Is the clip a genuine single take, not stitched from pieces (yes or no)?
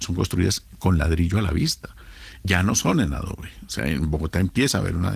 yes